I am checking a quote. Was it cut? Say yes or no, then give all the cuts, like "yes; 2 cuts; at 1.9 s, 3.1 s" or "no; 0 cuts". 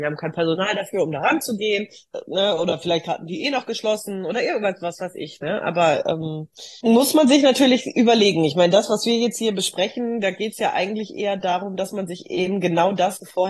yes; 1 cut; at 6.8 s